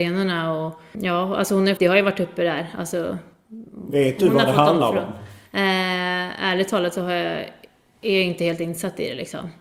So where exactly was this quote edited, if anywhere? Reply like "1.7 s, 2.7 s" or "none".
0.9 s, 1.8 s